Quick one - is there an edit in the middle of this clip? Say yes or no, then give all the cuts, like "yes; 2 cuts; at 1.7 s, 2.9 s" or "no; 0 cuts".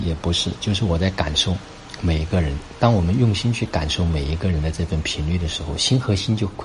no; 0 cuts